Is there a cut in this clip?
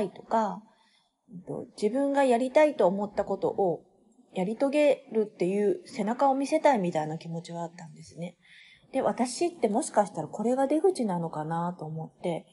no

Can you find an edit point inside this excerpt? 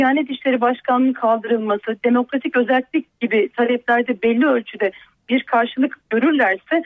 no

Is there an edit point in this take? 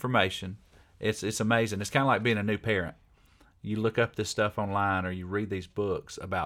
no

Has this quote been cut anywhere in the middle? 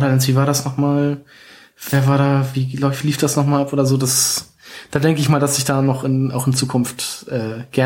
no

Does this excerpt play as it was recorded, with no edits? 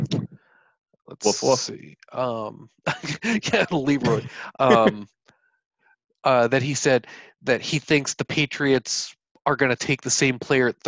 yes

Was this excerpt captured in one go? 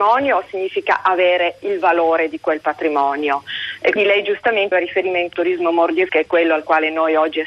no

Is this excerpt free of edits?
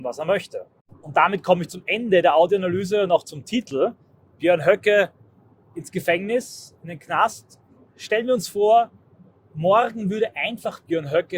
yes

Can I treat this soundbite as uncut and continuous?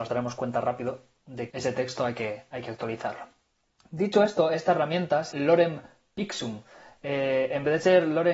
no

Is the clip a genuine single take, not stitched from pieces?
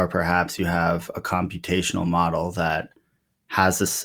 yes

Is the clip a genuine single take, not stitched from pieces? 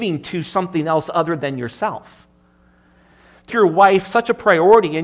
no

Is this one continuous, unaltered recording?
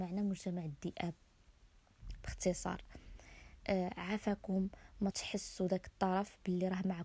no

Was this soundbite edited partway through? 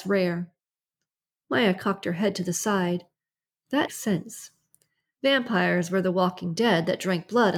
yes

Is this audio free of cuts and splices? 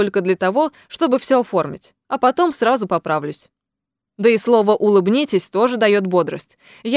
yes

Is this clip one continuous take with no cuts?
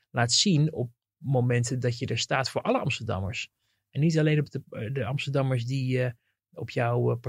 yes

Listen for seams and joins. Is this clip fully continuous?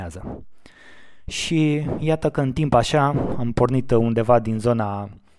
yes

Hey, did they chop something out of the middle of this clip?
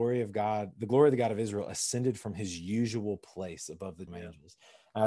yes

